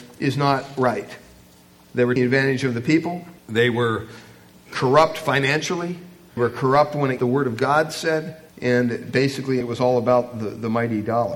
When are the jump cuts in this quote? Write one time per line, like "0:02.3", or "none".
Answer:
0:02.2
0:03.4
0:06.4
0:07.2
0:08.5
0:09.6